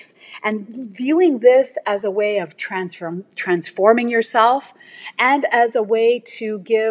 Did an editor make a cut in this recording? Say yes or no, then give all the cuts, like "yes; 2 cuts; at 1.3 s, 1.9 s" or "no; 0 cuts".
no; 0 cuts